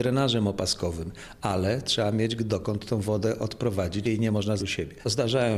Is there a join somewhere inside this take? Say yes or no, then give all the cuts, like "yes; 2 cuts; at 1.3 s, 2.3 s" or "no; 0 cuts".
yes; 2 cuts; at 4.0 s, 4.6 s